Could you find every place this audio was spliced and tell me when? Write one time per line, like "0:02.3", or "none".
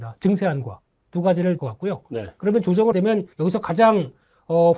0:01.6
0:02.9
0:03.3